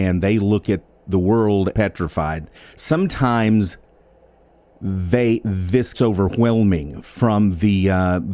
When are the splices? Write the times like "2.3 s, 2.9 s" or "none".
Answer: 1.7 s, 2.5 s, 5.9 s